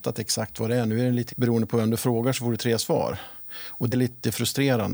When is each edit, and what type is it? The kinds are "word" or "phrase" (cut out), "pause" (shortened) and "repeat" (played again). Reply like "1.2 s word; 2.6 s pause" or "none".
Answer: 1.3 s word; 3.9 s word